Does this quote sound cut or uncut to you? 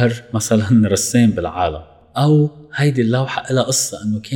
uncut